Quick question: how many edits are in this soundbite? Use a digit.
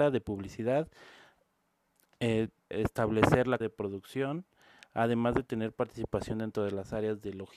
2